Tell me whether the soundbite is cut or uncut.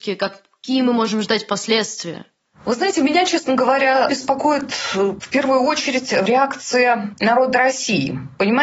uncut